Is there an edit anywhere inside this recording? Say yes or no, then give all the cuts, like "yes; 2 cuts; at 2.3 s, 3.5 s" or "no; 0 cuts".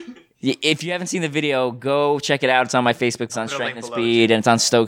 yes; 1 cut; at 3.3 s